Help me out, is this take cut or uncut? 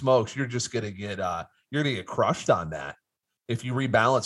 uncut